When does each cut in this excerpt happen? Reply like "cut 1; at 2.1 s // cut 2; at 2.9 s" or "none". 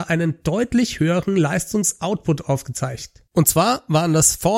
cut 1; at 3.3 s